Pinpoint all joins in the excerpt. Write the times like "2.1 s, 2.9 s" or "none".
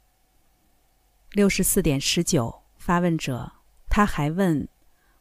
2.7 s, 3.8 s